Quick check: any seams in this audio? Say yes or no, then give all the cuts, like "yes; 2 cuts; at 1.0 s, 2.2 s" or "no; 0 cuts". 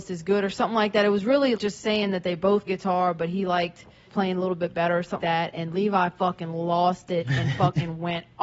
yes; 4 cuts; at 1.6 s, 2.7 s, 4.1 s, 5.2 s